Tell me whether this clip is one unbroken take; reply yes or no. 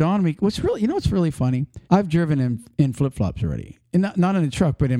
no